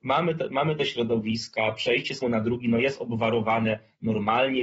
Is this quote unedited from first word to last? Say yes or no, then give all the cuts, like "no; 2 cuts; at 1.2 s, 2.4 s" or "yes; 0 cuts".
no; 1 cut; at 2.2 s